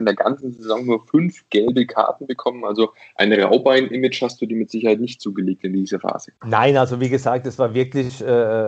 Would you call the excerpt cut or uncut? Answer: cut